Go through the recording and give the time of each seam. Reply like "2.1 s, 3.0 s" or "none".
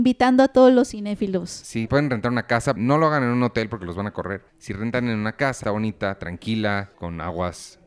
1.9 s, 2.8 s, 4.5 s, 5.6 s, 6.9 s